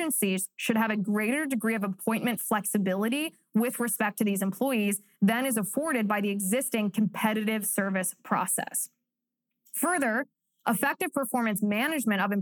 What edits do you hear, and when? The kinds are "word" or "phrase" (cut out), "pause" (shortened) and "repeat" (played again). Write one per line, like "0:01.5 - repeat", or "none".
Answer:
none

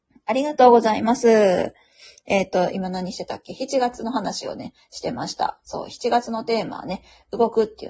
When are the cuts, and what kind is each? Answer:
none

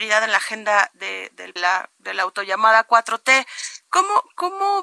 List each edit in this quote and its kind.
0:01.6 - phrase

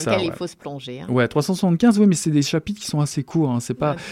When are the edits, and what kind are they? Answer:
none

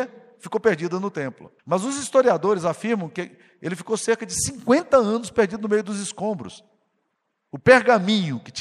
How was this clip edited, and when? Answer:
0:01.6 - pause

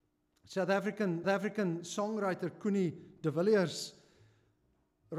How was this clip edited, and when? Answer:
0:01.2 - repeat

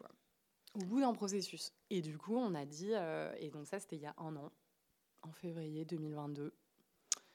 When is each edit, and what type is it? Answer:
none

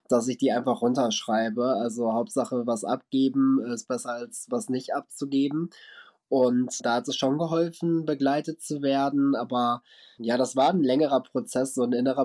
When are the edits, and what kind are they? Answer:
none

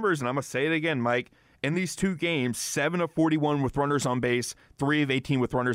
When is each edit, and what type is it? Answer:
none

